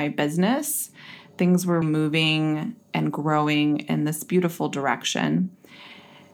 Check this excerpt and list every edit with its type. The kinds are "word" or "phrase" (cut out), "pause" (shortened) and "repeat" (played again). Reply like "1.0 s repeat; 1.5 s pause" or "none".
1.8 s word